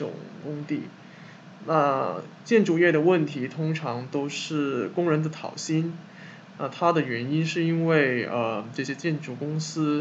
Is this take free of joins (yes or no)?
yes